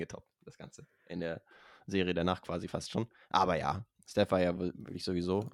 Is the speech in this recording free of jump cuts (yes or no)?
yes